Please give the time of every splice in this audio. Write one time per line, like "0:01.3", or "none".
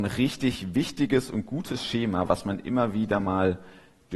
none